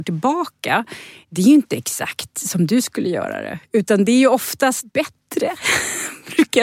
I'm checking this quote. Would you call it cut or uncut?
cut